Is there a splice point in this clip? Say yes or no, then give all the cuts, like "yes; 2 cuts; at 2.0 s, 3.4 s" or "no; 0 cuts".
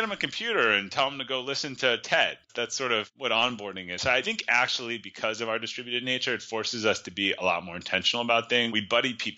no; 0 cuts